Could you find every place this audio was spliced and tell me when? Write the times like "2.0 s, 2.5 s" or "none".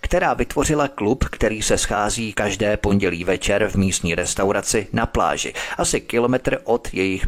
none